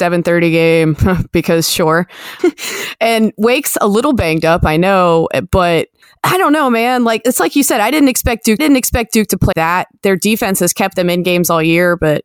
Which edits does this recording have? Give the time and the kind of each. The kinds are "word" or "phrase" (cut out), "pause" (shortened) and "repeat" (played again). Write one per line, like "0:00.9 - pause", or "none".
0:02.4 - word
0:06.0 - pause
0:08.6 - repeat
0:09.5 - word